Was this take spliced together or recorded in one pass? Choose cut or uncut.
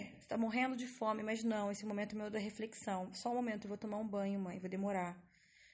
uncut